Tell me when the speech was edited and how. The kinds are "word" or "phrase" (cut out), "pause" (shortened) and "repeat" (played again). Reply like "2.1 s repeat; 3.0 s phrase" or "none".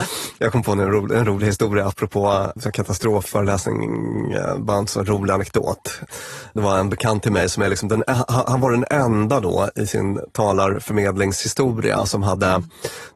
none